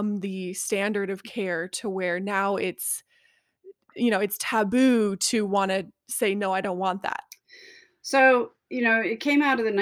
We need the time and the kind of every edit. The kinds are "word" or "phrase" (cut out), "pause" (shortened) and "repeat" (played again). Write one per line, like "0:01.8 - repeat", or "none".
0:08.7 - word